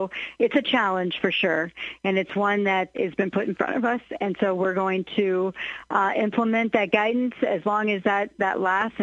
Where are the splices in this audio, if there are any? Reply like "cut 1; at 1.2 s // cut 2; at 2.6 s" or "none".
cut 1; at 2.9 s